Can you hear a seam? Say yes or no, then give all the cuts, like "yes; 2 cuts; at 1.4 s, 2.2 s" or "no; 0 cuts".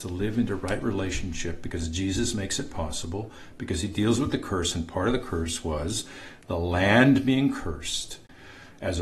no; 0 cuts